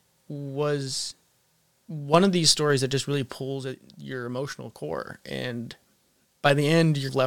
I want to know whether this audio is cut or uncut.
uncut